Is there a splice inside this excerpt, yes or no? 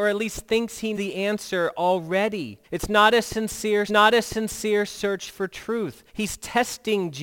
yes